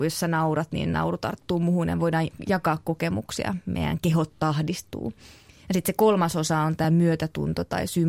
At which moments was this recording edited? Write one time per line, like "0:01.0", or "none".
none